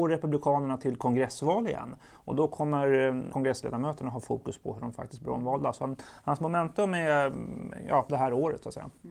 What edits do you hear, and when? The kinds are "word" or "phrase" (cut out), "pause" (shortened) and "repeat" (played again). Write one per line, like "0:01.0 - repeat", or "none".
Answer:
0:03.3 - word